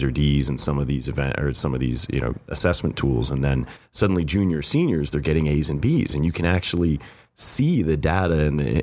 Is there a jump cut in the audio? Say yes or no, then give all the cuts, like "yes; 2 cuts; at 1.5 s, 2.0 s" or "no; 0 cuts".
no; 0 cuts